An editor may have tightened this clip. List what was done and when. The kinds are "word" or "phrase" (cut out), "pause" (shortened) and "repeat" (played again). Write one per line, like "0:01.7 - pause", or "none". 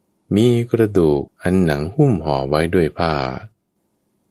0:01.3 - pause

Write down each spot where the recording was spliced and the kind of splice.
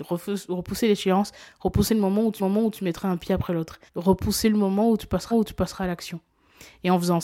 0:02.4 - repeat
0:03.9 - pause
0:05.3 - repeat

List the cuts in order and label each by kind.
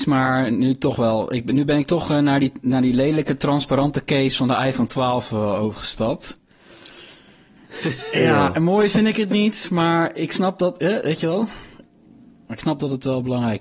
none

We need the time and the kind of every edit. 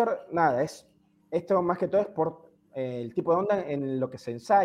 none

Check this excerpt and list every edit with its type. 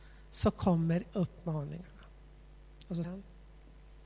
0:01.1 - word
0:03.0 - word

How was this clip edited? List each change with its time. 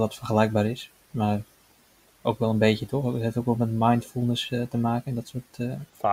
none

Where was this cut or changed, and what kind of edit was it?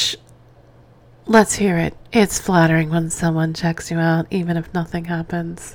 none

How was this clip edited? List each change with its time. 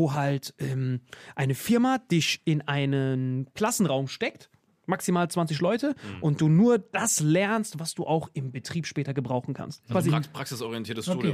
none

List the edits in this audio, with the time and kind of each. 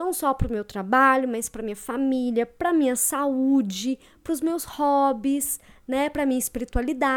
none

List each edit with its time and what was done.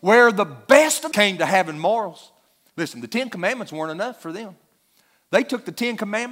0:01.1 - phrase

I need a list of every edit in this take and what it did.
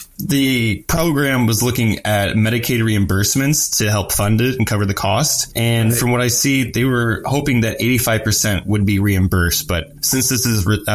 none

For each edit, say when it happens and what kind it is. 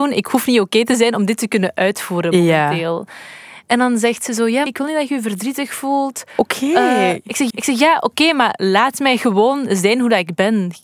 0:04.7 - phrase
0:07.5 - repeat

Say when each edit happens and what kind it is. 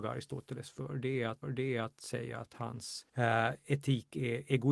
0:01.4 - repeat
0:03.1 - pause

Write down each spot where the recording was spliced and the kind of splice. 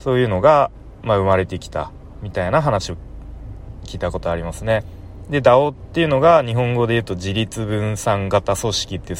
none

